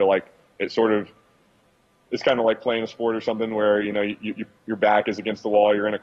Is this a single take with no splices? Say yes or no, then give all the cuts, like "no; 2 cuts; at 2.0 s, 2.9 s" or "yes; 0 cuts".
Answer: yes; 0 cuts